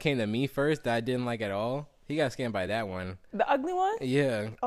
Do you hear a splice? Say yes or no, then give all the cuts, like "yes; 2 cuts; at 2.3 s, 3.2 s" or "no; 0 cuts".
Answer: no; 0 cuts